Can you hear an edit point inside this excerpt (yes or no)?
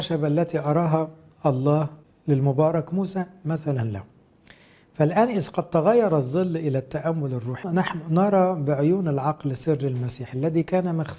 no